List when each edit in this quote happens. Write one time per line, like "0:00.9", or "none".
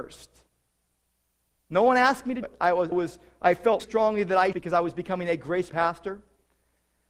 0:02.4
0:02.9
0:03.8
0:04.5
0:05.7